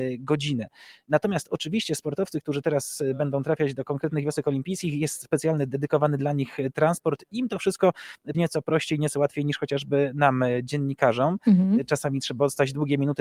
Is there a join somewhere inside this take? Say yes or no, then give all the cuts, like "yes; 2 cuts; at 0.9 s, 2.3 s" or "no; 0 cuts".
yes; 1 cut; at 8.3 s